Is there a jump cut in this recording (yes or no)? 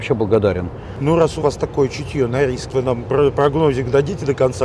yes